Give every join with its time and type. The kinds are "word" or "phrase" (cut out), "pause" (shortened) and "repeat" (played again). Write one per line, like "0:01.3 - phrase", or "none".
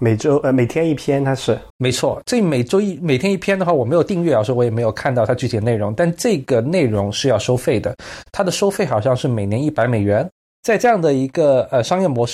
0:01.7 - pause